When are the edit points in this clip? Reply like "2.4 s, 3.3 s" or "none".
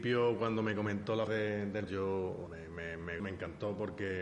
1.3 s, 1.9 s, 2.5 s, 3.2 s